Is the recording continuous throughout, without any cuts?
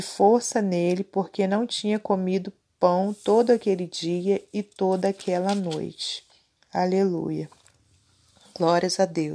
yes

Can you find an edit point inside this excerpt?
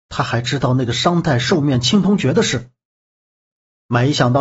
no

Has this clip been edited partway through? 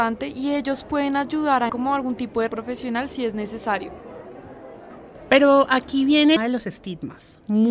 yes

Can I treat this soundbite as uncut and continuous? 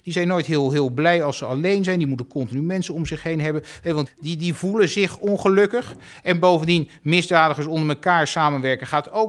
no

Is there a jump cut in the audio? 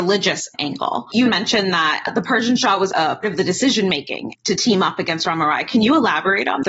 yes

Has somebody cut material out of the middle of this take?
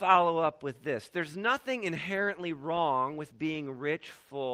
no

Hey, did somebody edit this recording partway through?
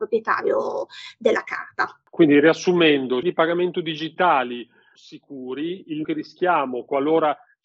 yes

